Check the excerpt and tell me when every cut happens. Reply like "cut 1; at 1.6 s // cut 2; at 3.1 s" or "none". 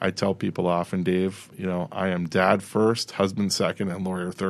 cut 1; at 1.5 s